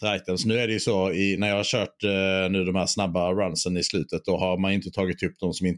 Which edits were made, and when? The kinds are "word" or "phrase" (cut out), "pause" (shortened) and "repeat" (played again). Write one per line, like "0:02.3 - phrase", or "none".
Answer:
none